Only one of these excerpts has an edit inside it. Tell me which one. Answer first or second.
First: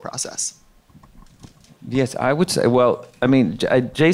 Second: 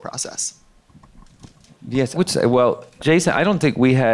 second